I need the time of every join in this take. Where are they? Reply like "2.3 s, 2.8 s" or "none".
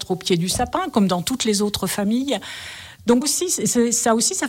3.2 s